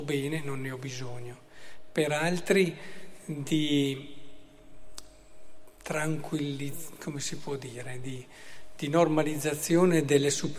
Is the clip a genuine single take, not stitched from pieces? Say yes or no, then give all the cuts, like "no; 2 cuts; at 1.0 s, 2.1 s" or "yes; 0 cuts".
yes; 0 cuts